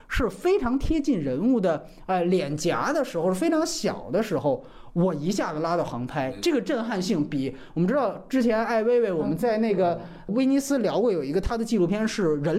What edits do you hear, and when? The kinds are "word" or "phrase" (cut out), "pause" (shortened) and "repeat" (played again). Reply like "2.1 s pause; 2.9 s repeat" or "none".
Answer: none